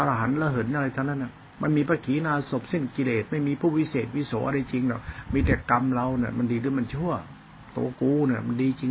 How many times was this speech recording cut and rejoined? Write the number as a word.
one